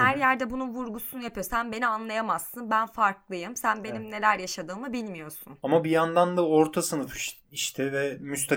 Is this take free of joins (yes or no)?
no